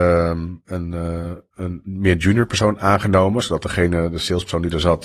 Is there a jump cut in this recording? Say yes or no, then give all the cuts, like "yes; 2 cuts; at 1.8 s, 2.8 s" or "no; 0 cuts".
no; 0 cuts